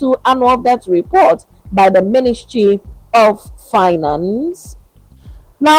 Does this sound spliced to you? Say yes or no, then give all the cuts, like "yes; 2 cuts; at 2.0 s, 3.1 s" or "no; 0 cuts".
no; 0 cuts